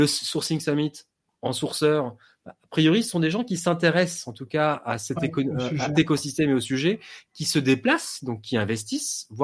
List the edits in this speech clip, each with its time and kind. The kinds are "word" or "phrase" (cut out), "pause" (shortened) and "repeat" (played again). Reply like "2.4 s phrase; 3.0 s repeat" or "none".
5.9 s phrase